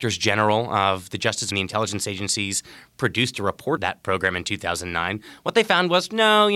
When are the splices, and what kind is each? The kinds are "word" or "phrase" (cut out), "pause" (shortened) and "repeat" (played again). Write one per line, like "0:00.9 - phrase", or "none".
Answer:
0:01.5 - phrase
0:03.8 - word